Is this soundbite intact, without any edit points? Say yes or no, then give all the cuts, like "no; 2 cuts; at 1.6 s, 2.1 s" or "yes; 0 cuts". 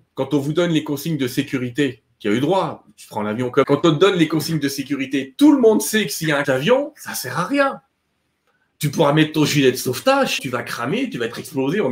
no; 3 cuts; at 3.6 s, 6.4 s, 10.4 s